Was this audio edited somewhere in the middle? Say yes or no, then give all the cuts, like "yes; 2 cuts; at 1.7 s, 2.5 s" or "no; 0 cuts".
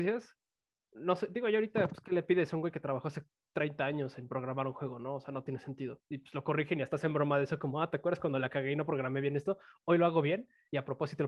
no; 0 cuts